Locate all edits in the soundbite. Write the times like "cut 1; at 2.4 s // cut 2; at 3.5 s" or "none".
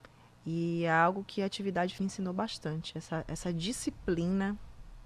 cut 1; at 2.0 s